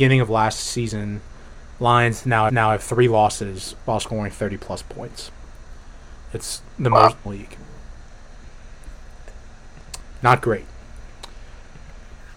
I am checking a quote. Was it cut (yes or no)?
yes